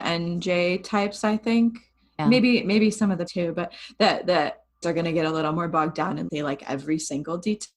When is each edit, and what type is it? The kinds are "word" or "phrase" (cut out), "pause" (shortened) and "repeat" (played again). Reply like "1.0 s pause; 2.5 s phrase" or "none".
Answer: 3.3 s word; 4.8 s word; 6.3 s word